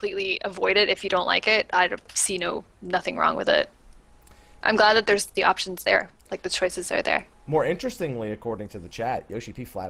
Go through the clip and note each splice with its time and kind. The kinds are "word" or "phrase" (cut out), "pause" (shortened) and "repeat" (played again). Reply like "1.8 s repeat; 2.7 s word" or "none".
2.0 s pause; 6.2 s pause; 7.3 s pause